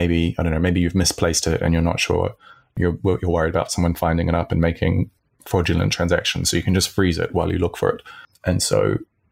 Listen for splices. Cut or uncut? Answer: uncut